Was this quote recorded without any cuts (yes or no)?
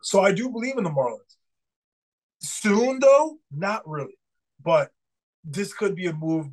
yes